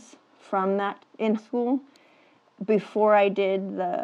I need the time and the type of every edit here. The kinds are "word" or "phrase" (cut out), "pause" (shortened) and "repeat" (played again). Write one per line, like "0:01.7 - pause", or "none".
0:01.0 - word
0:01.4 - word